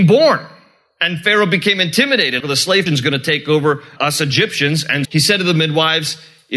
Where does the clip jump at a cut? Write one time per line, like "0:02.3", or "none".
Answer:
0:02.4
0:02.9
0:05.0